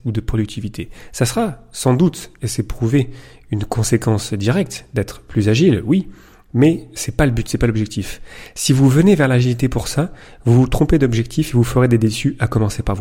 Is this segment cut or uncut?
uncut